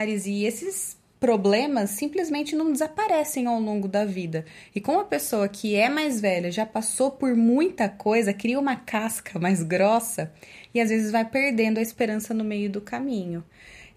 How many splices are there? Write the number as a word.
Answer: one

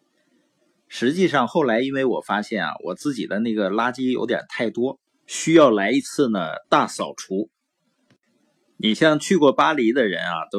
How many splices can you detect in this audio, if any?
two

